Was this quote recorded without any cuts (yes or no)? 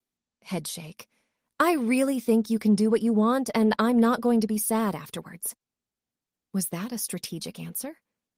yes